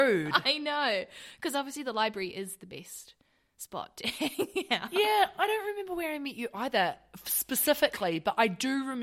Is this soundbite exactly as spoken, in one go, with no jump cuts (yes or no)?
yes